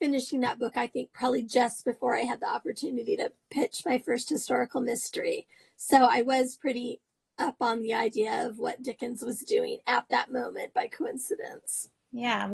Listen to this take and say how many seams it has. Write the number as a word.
zero